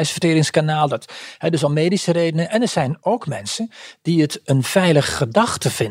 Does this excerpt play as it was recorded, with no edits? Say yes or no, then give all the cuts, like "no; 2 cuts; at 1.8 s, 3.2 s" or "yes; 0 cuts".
yes; 0 cuts